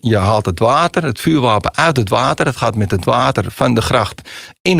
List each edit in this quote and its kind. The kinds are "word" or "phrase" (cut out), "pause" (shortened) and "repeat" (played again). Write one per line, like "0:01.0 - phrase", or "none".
none